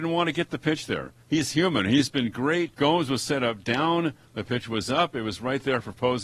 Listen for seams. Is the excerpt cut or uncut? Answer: cut